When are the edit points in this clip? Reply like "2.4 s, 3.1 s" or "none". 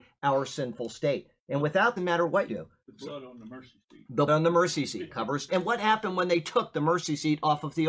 2.0 s, 2.5 s, 4.3 s, 5.5 s